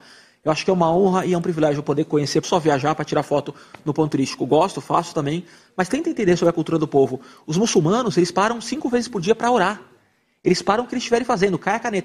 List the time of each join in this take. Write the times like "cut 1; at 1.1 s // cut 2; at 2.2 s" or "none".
cut 1; at 2.4 s

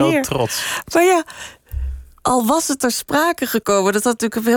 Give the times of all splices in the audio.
none

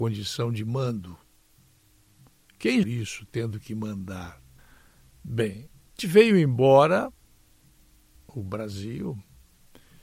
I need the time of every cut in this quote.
cut 1; at 2.8 s // cut 2; at 4.6 s // cut 3; at 6.0 s // cut 4; at 8.1 s

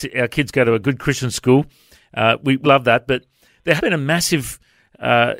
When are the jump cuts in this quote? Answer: cut 1; at 2.6 s // cut 2; at 3.8 s

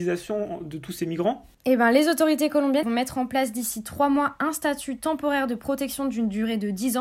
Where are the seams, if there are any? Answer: cut 1; at 2.8 s

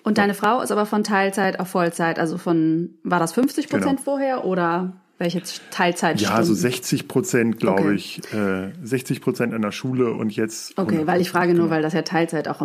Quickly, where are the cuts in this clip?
none

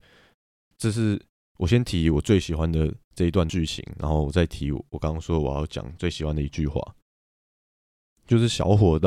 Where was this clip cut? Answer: none

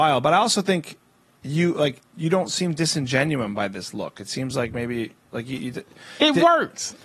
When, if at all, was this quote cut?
none

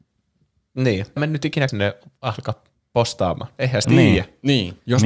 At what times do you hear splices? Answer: cut 1; at 1.2 s // cut 2; at 1.7 s // cut 3; at 3.8 s

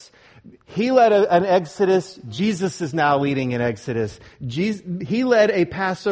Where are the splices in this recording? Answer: none

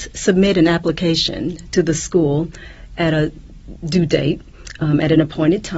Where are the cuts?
none

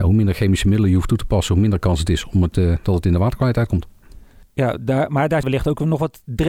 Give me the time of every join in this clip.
cut 1; at 4.4 s // cut 2; at 5.4 s

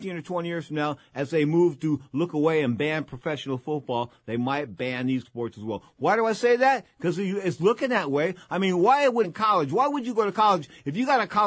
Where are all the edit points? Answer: cut 1; at 5.2 s // cut 2; at 9.2 s

